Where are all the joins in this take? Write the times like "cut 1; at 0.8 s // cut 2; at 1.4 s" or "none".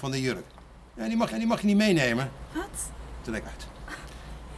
cut 1; at 1.3 s // cut 2; at 3.4 s